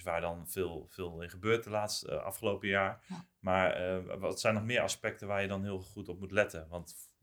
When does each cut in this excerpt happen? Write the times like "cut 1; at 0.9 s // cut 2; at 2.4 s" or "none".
none